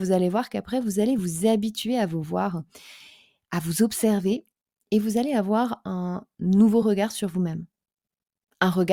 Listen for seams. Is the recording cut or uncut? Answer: uncut